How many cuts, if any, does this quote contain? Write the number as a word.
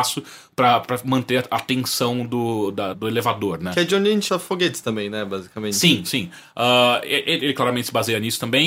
two